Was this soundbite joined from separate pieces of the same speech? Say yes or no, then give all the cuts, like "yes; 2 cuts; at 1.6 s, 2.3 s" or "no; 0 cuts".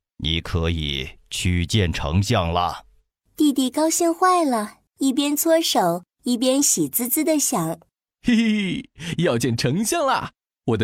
yes; 1 cut; at 4.9 s